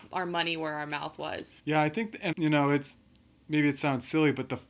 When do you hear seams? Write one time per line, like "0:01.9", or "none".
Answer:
0:01.6
0:02.3